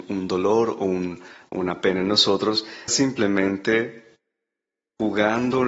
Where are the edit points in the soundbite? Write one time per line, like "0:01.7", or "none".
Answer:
0:02.9